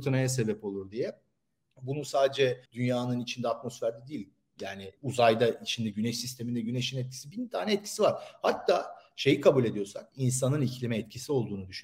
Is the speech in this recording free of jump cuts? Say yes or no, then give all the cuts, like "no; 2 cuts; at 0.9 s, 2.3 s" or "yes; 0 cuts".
no; 2 cuts; at 2.7 s, 5.0 s